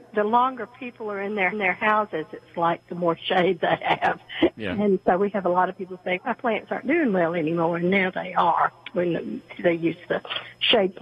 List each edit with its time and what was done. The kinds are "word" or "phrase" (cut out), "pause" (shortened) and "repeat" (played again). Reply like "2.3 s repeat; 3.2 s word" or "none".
1.5 s repeat; 6.2 s word